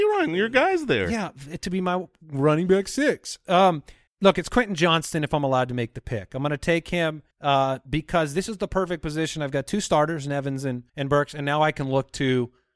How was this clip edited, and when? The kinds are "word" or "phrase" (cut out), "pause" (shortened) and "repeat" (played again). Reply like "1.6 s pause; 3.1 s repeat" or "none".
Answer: 4.1 s pause; 7.3 s pause; 10.9 s pause